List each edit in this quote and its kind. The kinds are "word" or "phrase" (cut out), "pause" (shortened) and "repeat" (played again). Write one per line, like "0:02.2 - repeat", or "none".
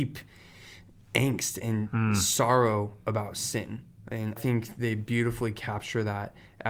0:04.4 - word